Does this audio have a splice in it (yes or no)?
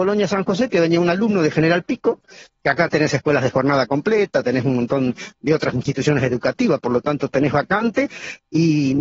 no